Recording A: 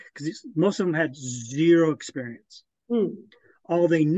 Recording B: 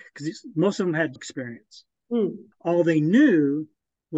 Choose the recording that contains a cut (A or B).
B